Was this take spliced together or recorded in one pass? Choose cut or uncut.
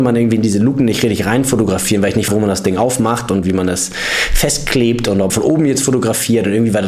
cut